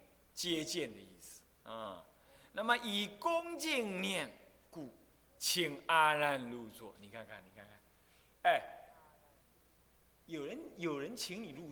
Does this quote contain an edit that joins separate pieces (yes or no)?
no